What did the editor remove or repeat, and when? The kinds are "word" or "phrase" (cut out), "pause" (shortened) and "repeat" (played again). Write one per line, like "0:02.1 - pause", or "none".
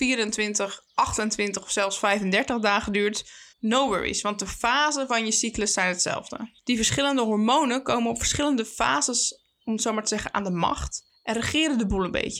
0:03.5 - pause
0:06.6 - pause
0:11.1 - pause

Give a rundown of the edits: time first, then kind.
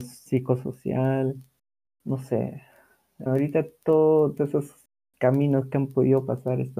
0:01.9 - word
0:03.3 - word
0:04.4 - word

